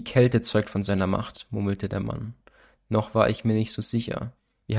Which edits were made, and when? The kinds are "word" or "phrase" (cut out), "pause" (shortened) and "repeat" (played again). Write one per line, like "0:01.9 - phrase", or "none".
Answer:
none